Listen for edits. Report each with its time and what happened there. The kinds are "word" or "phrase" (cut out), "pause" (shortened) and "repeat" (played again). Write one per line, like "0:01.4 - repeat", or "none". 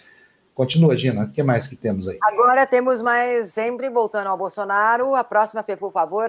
none